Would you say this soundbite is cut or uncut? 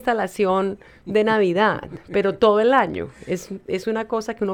uncut